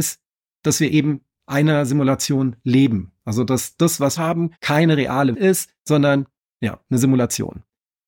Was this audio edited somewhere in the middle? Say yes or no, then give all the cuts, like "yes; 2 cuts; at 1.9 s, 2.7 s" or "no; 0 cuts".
yes; 5 cuts; at 1.4 s, 4.2 s, 4.6 s, 5.3 s, 5.8 s